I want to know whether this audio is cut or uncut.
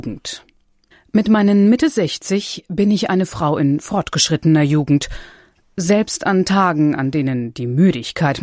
uncut